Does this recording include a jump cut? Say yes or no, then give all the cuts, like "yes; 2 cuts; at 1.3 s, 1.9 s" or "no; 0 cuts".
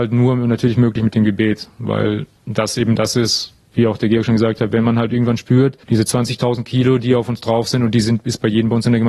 yes; 2 cuts; at 2.4 s, 5.8 s